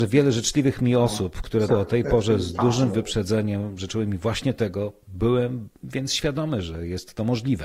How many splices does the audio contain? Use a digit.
1